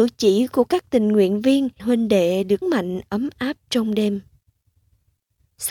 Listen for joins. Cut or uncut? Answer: cut